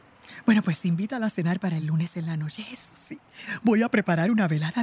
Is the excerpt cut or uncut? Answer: uncut